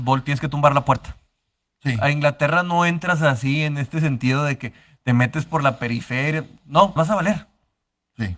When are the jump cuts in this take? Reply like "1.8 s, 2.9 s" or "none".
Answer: 7.0 s